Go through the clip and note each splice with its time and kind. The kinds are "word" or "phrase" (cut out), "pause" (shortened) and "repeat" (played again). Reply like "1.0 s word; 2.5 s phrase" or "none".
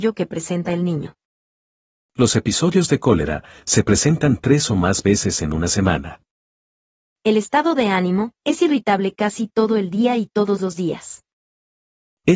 8.4 s pause